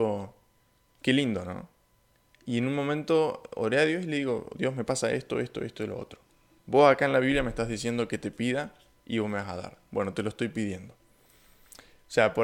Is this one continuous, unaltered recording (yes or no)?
yes